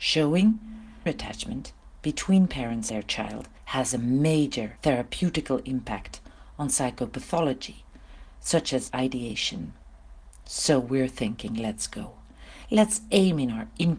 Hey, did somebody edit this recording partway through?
yes; 6 cuts; at 1.1 s, 2.9 s, 3.6 s, 4.8 s, 8.9 s, 10.3 s

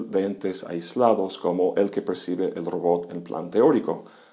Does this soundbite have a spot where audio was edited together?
no; 0 cuts

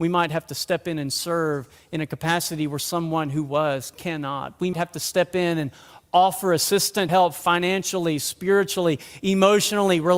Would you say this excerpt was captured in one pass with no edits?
no; 2 cuts; at 4.7 s, 7.1 s

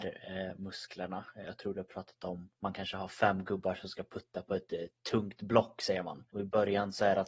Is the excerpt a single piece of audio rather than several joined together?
no; 3 cuts; at 2.6 s, 5.0 s, 6.3 s

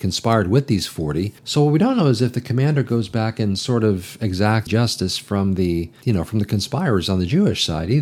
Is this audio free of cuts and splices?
no; 3 cuts; at 1.4 s, 4.7 s, 6.0 s

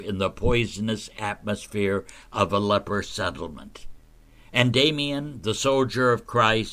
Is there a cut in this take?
no; 0 cuts

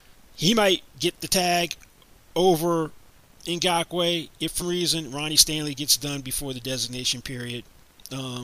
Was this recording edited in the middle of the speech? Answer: yes; 1 cut; at 4.6 s

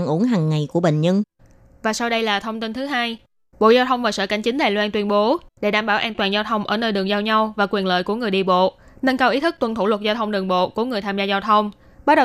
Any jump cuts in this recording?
no; 0 cuts

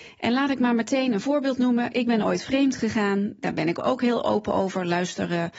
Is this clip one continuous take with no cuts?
yes; 0 cuts

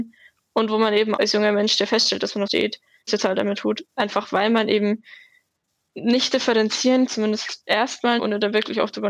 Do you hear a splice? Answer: yes; 6 cuts; at 1.2 s, 2.5 s, 3.1 s, 3.6 s, 7.1 s, 8.2 s

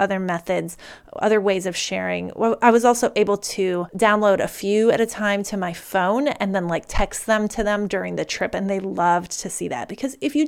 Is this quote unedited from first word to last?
yes; 0 cuts

